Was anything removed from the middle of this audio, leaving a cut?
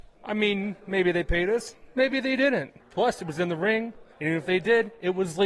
yes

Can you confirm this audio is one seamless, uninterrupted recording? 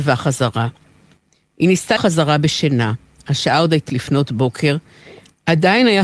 no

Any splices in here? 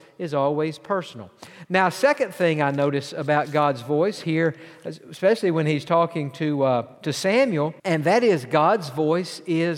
yes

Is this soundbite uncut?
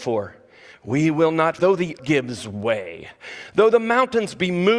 no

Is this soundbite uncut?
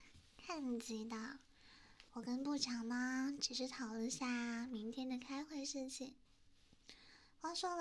no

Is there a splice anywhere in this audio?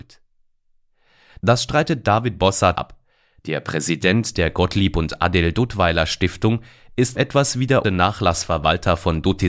yes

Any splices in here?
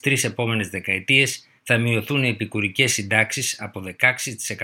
yes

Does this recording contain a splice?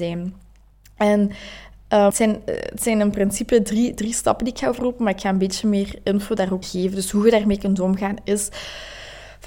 yes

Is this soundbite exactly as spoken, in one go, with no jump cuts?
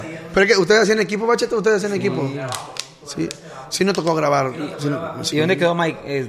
yes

